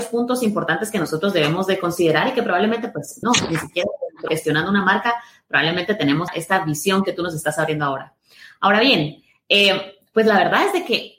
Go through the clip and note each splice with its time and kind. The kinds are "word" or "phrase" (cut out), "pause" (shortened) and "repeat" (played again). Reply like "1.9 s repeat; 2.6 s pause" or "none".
3.2 s word; 4.3 s phrase; 6.3 s word